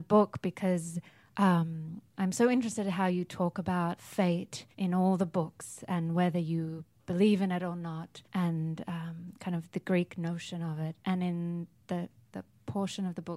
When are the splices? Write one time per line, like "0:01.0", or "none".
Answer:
0:02.1
0:04.0
0:04.7
0:08.2
0:12.3